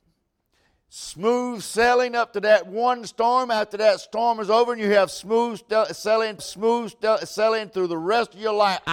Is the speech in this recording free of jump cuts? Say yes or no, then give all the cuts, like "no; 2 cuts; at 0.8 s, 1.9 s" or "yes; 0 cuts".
no; 1 cut; at 6.4 s